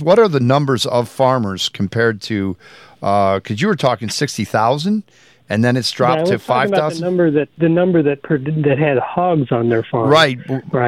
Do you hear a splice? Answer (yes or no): yes